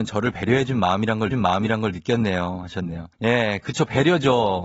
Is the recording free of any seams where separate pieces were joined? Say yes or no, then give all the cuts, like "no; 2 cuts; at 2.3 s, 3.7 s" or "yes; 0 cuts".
no; 2 cuts; at 1.3 s, 3.1 s